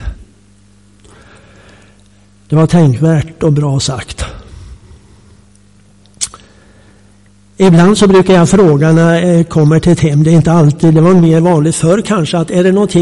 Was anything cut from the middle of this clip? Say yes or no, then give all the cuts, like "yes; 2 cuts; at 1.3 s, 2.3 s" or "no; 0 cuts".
no; 0 cuts